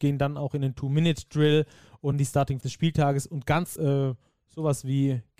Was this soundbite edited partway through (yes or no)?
yes